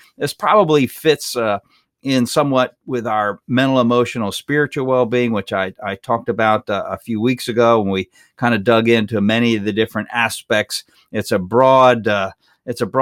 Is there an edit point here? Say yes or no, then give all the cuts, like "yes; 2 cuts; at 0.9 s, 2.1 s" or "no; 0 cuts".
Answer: no; 0 cuts